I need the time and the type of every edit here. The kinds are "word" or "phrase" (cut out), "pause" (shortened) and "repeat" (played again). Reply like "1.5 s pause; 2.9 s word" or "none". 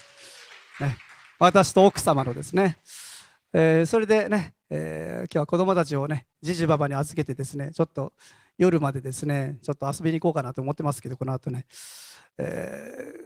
none